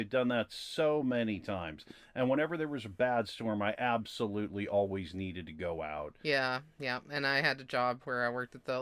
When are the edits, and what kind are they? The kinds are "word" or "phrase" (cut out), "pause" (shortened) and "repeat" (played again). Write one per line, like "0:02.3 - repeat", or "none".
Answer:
none